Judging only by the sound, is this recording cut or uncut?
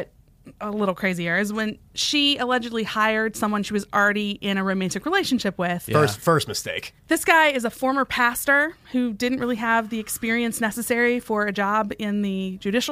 cut